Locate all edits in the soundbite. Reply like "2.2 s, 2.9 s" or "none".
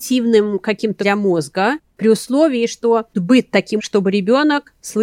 1.0 s, 3.1 s, 3.8 s